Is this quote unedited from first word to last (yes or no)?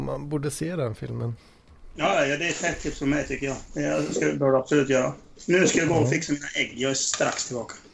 yes